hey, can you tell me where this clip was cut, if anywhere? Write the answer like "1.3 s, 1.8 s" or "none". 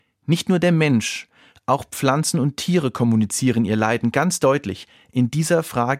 none